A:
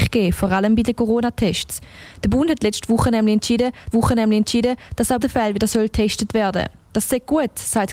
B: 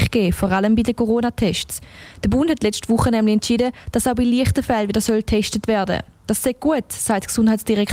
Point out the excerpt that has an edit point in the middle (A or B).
A